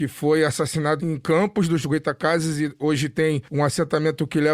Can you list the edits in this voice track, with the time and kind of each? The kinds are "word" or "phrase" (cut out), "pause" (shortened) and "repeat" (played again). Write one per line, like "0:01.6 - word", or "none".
0:01.0 - word